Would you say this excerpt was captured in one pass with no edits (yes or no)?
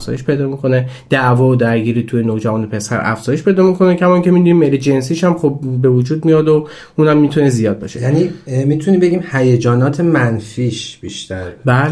yes